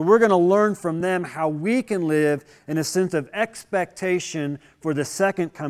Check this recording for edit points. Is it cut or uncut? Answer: uncut